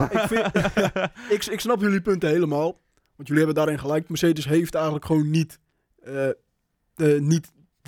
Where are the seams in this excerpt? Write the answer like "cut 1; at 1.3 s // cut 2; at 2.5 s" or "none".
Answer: none